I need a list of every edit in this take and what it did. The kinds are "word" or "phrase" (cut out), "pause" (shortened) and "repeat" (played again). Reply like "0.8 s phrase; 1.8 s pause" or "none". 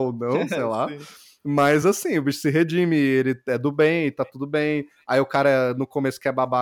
none

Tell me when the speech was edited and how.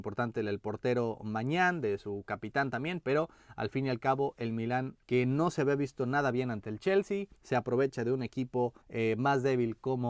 5.0 s pause; 7.4 s pause; 8.8 s pause

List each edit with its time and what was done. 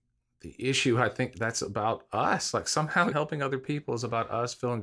3.1 s word

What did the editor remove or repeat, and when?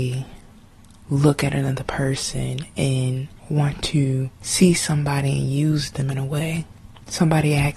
3.4 s pause; 4.3 s pause

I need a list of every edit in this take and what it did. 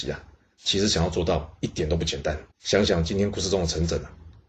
2.5 s pause

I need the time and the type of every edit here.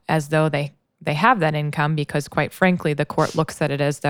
none

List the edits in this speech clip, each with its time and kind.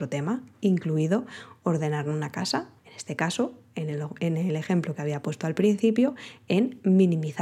2.8 s pause

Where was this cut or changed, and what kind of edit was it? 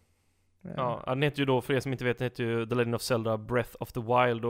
none

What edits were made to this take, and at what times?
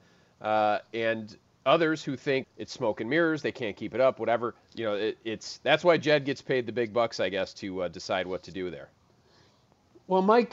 1.4 s pause; 2.4 s word; 4.6 s pause

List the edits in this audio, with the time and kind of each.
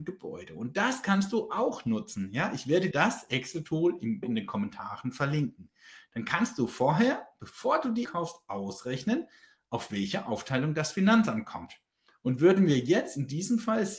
2.9 s word; 4.2 s word; 8.0 s word

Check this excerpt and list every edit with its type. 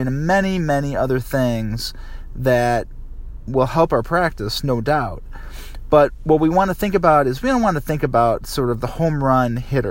3.5 s word

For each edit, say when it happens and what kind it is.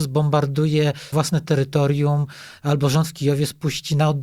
1.1 s word

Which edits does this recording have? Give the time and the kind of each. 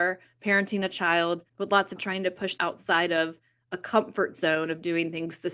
1.5 s pause; 2.0 s phrase; 2.6 s word

